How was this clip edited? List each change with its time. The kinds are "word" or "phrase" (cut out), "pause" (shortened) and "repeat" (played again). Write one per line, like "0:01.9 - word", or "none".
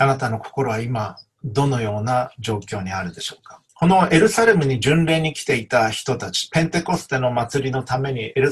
0:03.7 - pause